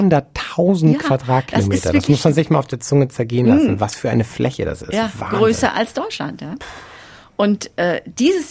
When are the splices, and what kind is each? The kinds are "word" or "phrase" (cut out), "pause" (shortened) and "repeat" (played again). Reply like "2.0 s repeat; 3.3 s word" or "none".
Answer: none